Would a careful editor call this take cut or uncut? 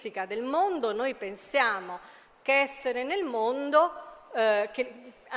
uncut